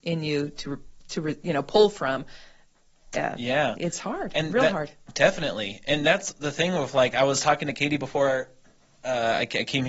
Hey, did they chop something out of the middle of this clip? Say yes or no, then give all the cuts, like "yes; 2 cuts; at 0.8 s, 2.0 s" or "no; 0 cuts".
no; 0 cuts